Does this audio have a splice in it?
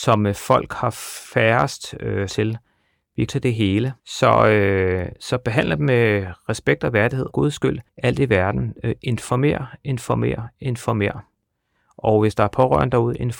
yes; 5 cuts; at 2.3 s, 3.3 s, 4.0 s, 7.3 s, 7.9 s

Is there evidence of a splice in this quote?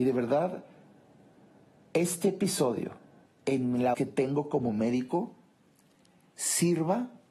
yes; 2 cuts; at 3.3 s, 3.9 s

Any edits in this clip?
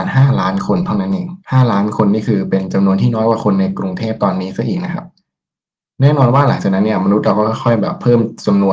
yes; 1 cut; at 1.4 s

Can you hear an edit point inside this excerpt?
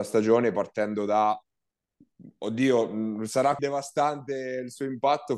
yes; 1 cut; at 3.6 s

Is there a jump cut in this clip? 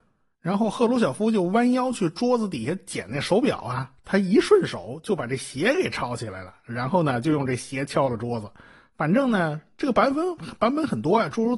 no; 0 cuts

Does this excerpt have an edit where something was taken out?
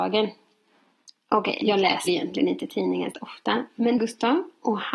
yes; 4 cuts; at 1.6 s, 2.1 s, 3.1 s, 4.0 s

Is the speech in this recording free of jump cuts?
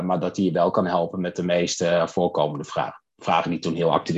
yes; 0 cuts

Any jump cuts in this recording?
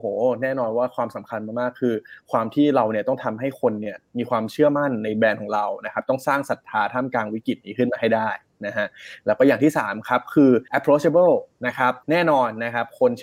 yes; 2 cuts; at 10.7 s, 12.0 s

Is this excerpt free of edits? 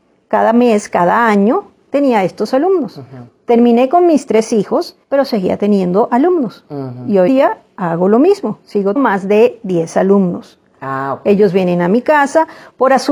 no; 3 cuts; at 5.0 s, 7.3 s, 9.0 s

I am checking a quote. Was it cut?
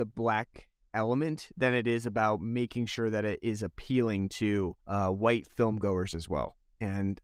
yes; 1 cut; at 4.8 s

